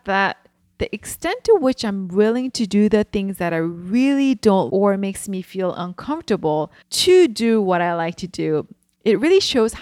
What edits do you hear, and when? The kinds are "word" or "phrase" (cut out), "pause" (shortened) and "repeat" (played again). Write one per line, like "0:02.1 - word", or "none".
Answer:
0:04.7 - word
0:06.8 - pause